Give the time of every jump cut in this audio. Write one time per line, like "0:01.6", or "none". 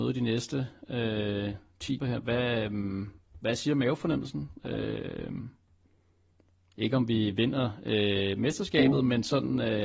0:02.0